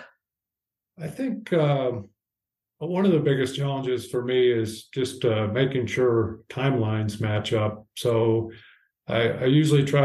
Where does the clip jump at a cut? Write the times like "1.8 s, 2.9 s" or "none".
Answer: none